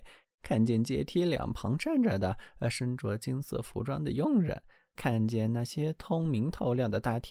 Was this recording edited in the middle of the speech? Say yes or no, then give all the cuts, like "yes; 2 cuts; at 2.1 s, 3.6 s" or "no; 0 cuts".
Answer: yes; 1 cut; at 5.0 s